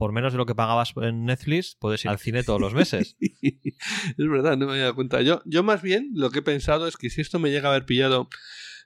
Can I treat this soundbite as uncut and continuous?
no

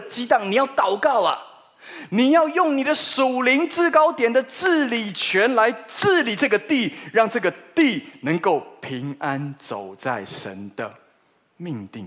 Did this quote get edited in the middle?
no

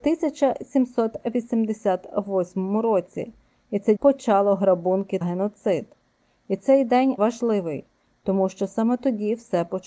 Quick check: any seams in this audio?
yes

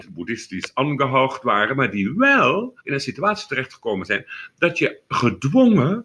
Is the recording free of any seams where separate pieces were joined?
no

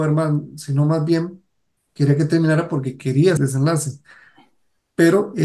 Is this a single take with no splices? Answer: no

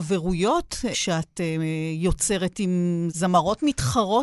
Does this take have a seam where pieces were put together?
no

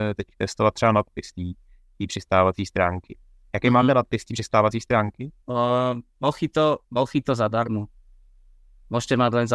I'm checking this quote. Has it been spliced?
yes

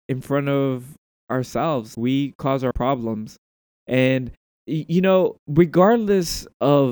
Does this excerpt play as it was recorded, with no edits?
no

